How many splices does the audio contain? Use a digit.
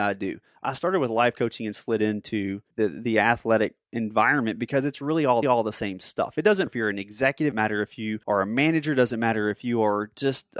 5